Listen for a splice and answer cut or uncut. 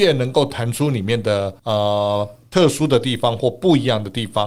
cut